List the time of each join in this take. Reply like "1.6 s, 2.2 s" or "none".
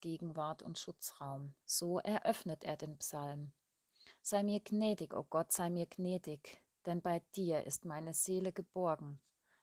1.6 s